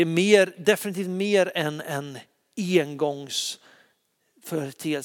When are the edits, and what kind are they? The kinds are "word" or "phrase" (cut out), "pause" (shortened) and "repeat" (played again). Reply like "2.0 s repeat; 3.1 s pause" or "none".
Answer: none